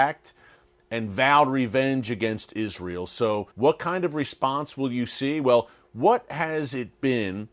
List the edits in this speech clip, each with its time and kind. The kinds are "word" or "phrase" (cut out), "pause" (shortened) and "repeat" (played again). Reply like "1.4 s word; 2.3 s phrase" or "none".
3.5 s pause